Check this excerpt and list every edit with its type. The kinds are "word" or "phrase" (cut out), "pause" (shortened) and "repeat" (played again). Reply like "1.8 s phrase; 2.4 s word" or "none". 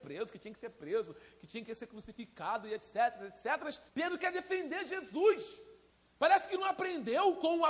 3.9 s pause; 5.9 s pause